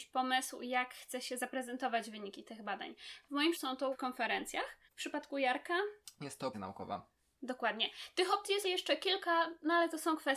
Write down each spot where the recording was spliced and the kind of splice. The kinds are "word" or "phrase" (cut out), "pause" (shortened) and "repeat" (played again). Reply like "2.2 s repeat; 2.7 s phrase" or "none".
3.5 s word; 3.9 s word; 4.9 s pause; 6.5 s word; 8.6 s word